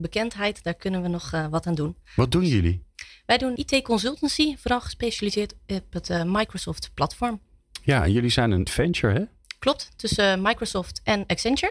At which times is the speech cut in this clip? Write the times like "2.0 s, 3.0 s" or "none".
3.6 s, 8.7 s